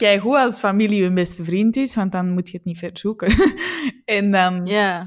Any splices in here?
no; 0 cuts

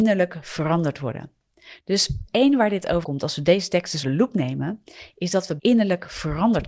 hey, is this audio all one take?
no; 4 cuts; at 2.3 s, 3.0 s, 4.0 s, 5.6 s

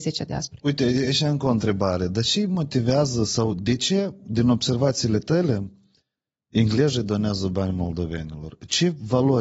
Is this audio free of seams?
yes; 0 cuts

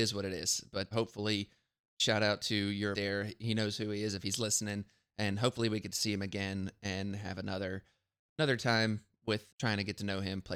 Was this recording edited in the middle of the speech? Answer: yes; 3 cuts; at 0.9 s, 2.9 s, 9.5 s

